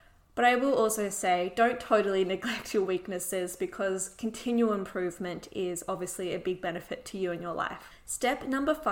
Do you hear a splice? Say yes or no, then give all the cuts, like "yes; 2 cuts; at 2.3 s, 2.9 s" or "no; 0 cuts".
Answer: no; 0 cuts